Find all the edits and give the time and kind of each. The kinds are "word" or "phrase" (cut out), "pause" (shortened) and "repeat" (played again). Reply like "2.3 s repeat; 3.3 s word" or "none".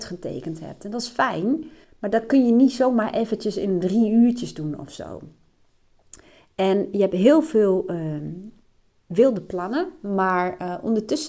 1.8 s pause